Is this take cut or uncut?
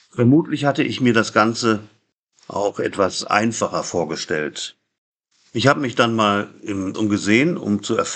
cut